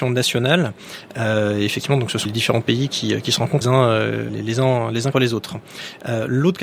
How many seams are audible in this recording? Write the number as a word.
four